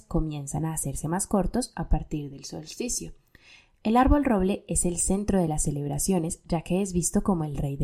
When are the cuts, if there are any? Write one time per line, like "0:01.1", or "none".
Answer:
none